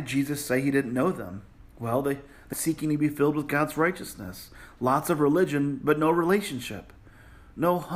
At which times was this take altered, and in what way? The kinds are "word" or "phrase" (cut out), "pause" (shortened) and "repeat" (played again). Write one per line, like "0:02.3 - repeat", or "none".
0:01.6 - pause
0:02.5 - word